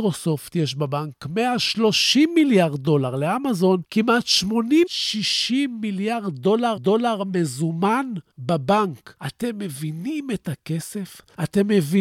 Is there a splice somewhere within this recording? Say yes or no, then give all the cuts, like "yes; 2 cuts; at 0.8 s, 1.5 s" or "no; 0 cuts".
yes; 3 cuts; at 4.9 s, 6.8 s, 10.4 s